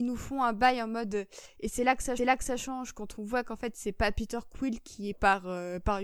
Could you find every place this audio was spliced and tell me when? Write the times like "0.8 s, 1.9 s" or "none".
2.2 s, 5.1 s